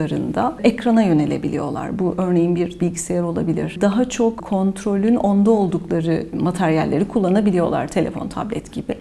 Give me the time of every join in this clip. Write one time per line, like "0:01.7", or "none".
0:02.8
0:06.3